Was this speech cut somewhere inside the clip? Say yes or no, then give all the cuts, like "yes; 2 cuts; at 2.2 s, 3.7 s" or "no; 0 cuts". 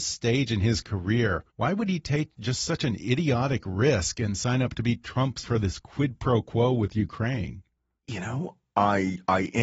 yes; 2 cuts; at 1.5 s, 5.4 s